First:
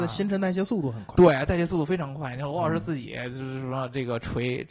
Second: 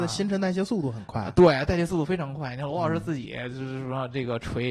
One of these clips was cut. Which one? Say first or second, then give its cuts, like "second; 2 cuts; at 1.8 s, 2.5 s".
first; 1 cut; at 1.1 s